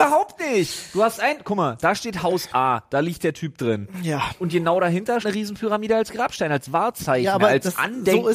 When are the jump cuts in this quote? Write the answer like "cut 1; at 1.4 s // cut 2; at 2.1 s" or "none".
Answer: cut 1; at 5.2 s